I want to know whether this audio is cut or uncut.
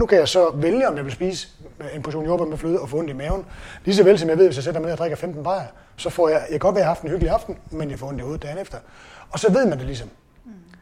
uncut